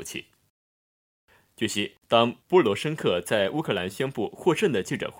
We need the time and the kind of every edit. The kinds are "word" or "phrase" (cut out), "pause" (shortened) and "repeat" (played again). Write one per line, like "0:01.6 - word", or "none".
0:02.4 - pause

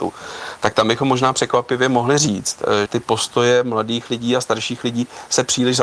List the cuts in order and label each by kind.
0:02.9 - word

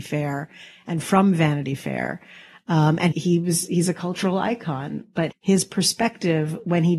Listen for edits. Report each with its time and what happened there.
0:03.1 - word
0:05.3 - word

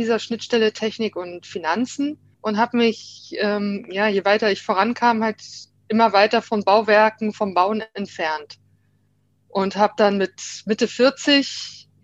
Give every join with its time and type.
0:02.3 - pause

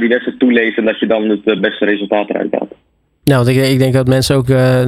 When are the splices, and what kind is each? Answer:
none

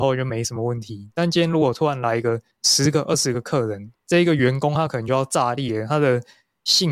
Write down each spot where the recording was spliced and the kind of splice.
0:02.5 - pause

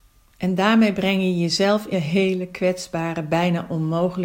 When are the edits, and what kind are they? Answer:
0:01.9 - phrase

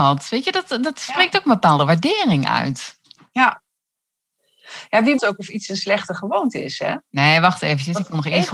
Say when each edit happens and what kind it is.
0:05.2 - word

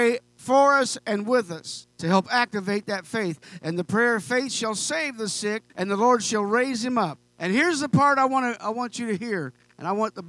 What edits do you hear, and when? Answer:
0:01.9 - pause
0:05.7 - pause
0:07.3 - pause

